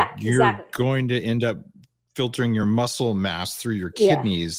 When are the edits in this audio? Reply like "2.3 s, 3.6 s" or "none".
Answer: none